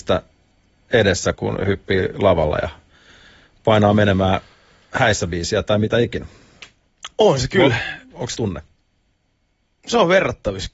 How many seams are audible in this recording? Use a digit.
2